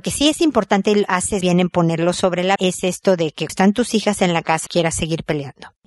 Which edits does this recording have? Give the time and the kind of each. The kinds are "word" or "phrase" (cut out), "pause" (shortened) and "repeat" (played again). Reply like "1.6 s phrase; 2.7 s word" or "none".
1.4 s word; 2.6 s word; 3.5 s word; 4.7 s word